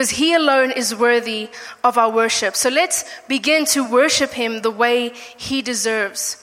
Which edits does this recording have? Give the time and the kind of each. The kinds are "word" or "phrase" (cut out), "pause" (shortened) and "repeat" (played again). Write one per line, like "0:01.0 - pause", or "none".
none

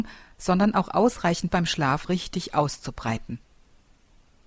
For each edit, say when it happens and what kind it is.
0:01.5 - phrase
0:02.0 - word

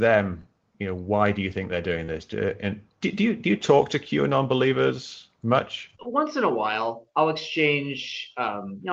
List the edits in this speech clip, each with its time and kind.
0:05.9 - pause

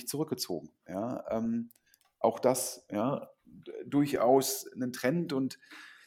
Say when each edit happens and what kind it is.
none

